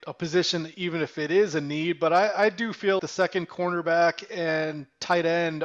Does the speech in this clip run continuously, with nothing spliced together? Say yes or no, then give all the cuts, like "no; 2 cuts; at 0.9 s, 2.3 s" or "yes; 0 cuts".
no; 1 cut; at 3.0 s